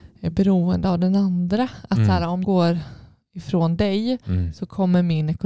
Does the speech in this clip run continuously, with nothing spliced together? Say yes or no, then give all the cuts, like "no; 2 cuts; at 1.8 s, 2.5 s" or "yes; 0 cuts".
no; 1 cut; at 2.4 s